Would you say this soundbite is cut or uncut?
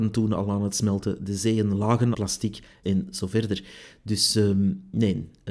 cut